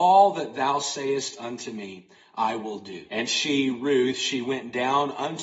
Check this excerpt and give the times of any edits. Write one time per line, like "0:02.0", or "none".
0:03.1